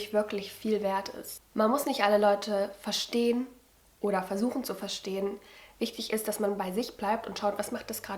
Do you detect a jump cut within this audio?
no; 0 cuts

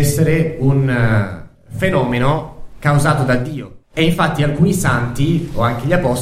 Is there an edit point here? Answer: yes; 2 cuts; at 1.6 s, 3.8 s

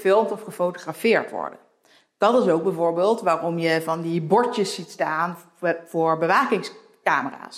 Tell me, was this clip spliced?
no; 0 cuts

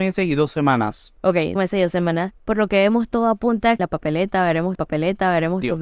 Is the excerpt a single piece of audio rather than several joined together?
no; 4 cuts; at 1.6 s, 2.4 s, 3.8 s, 4.7 s

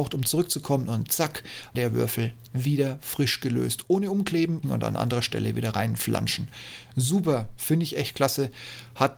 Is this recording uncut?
no; 2 cuts; at 1.7 s, 4.6 s

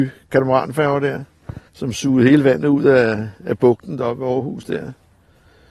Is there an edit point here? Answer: yes; 2 cuts; at 1.7 s, 3.4 s

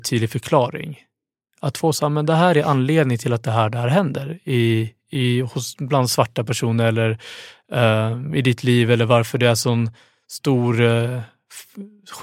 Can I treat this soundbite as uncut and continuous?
yes; 0 cuts

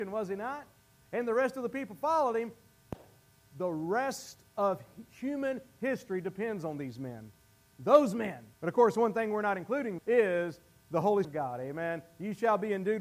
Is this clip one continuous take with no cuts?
no; 3 cuts; at 8.5 s, 10.0 s, 11.2 s

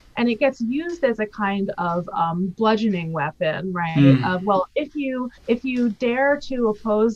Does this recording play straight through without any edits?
no; 1 cut; at 5.4 s

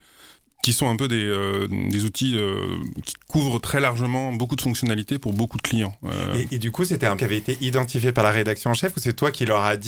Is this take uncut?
no; 2 cuts; at 1.7 s, 7.2 s

